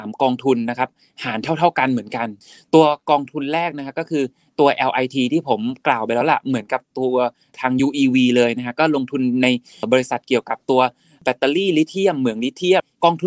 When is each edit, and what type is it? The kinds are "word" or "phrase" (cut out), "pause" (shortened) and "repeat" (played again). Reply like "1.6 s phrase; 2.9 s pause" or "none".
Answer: none